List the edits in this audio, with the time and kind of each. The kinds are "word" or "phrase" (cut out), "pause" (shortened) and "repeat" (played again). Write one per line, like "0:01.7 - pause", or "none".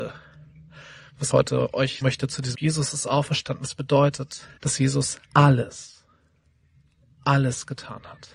0:01.3 - word
0:02.0 - word
0:02.5 - phrase
0:04.6 - pause
0:05.2 - pause